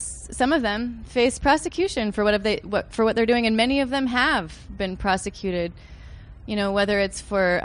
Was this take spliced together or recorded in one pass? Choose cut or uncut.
uncut